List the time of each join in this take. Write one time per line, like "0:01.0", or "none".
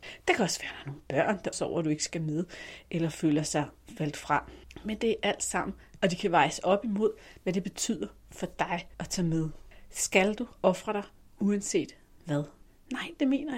0:01.5
0:06.0
0:08.9
0:10.5